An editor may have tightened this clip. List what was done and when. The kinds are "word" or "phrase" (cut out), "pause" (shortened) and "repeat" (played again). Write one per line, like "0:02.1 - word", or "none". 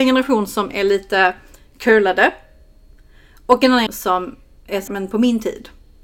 0:03.9 - word
0:04.9 - word